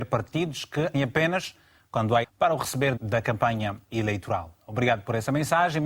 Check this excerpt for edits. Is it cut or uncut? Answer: cut